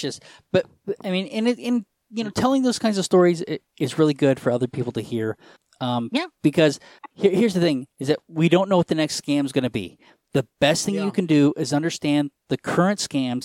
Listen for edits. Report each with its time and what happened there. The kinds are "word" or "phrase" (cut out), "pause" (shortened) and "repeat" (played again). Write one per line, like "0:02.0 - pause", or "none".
none

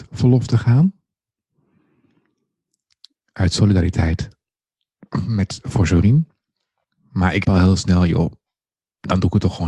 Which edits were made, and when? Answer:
0:07.4 - word

